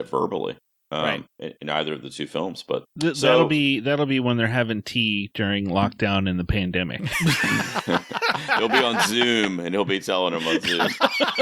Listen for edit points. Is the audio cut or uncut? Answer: cut